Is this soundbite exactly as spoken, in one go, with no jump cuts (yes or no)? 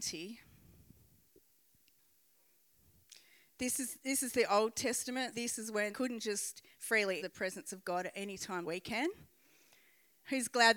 no